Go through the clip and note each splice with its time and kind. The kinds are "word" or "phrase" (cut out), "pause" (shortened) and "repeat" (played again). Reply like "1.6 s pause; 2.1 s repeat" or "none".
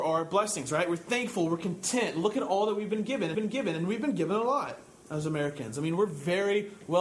3.3 s repeat